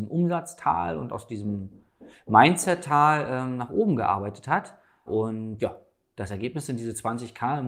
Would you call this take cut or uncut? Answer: uncut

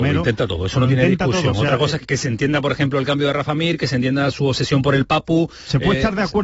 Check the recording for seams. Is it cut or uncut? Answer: cut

